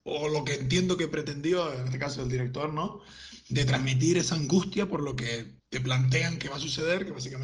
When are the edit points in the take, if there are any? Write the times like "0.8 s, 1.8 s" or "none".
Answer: 5.6 s